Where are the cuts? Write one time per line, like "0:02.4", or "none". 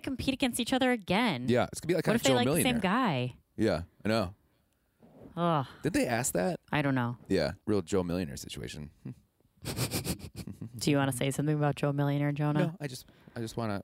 0:03.9
0:06.6
0:07.6